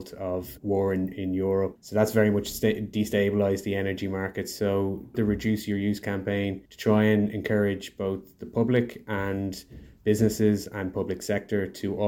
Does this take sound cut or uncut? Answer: cut